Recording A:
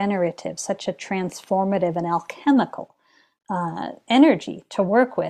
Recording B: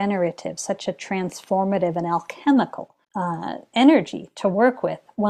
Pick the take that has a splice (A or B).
B